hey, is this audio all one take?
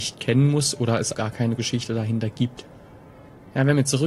no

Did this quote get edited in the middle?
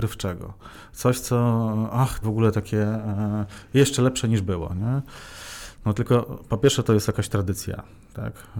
yes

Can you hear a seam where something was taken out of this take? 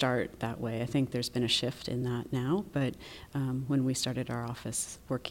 no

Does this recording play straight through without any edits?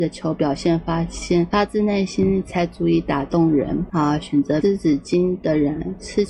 no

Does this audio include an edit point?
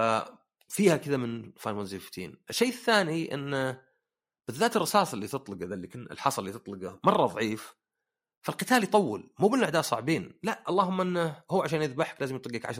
no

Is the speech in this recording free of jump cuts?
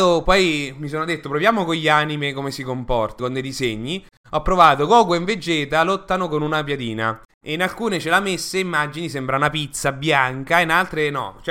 no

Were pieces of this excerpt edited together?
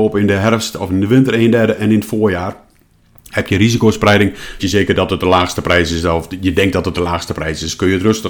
yes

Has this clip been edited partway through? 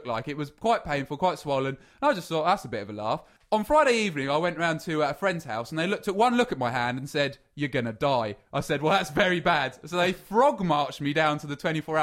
no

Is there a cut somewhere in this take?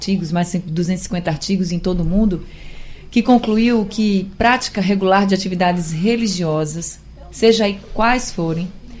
no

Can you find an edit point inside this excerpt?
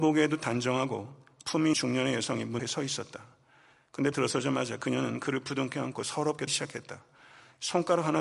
yes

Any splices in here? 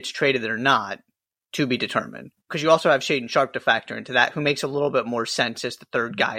yes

